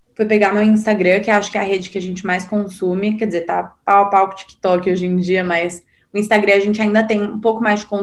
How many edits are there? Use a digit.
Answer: 0